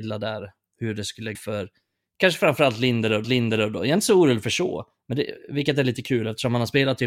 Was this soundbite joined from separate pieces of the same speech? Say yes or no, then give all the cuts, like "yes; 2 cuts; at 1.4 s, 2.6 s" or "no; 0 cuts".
yes; 2 cuts; at 1.3 s, 3.2 s